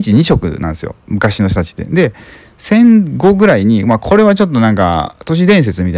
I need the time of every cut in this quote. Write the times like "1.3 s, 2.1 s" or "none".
none